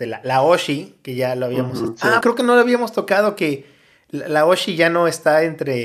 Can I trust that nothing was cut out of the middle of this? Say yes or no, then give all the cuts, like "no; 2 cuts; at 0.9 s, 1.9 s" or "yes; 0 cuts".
no; 1 cut; at 2.2 s